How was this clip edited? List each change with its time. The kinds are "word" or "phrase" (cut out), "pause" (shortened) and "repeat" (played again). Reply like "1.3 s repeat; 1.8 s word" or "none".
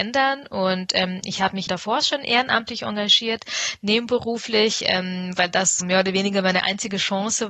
1.7 s word; 5.8 s word